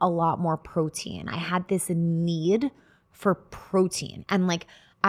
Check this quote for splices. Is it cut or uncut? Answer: cut